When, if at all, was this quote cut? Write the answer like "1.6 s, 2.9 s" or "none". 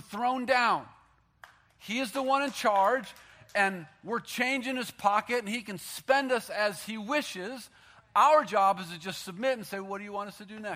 none